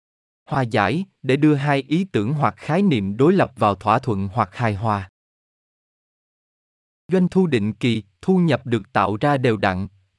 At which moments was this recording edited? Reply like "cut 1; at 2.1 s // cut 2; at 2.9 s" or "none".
none